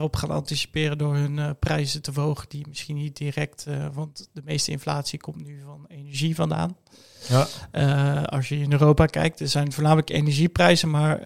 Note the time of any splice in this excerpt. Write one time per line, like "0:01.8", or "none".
none